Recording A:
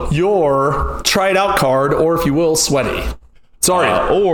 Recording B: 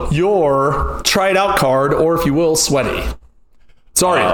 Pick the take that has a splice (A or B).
A